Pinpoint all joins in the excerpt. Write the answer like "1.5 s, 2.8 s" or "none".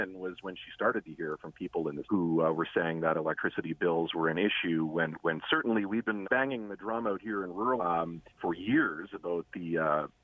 2.0 s, 5.2 s, 6.2 s, 7.8 s, 8.3 s